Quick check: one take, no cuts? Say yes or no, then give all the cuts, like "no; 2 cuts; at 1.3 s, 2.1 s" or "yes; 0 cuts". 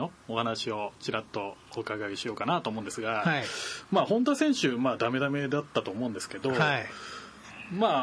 yes; 0 cuts